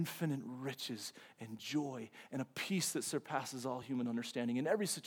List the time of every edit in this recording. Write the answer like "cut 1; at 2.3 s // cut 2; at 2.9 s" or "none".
none